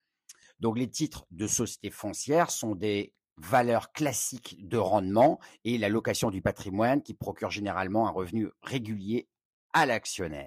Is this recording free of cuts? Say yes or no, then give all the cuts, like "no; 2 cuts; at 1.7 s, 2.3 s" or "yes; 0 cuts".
yes; 0 cuts